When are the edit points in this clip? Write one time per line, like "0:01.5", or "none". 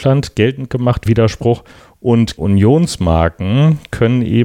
0:01.1
0:02.4